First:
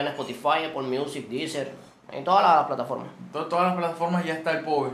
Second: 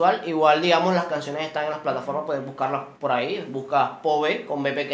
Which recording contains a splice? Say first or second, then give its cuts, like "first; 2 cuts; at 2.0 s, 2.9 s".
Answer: second; 1 cut; at 3.0 s